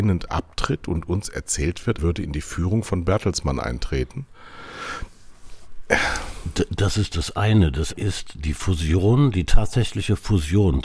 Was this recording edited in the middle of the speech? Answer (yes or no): yes